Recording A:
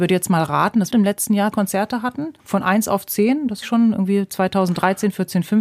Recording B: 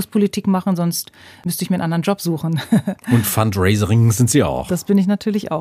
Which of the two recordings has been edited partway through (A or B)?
A